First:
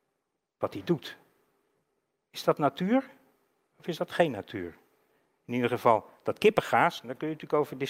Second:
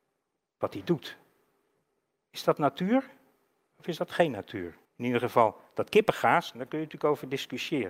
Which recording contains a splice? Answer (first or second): second